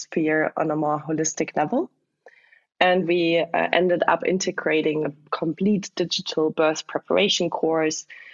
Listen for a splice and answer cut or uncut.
uncut